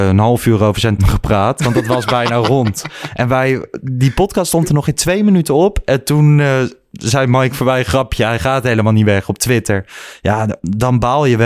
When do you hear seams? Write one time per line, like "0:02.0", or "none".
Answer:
0:01.0